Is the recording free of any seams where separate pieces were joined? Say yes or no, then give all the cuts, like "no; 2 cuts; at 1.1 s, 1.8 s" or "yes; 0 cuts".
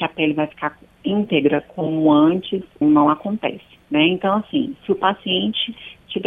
no; 1 cut; at 2.8 s